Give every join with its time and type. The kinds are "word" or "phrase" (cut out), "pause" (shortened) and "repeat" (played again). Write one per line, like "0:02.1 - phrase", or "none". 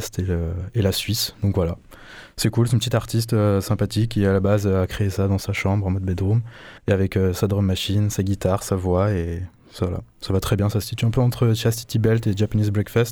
0:06.8 - pause